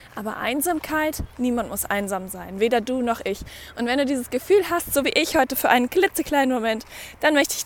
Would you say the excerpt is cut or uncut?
uncut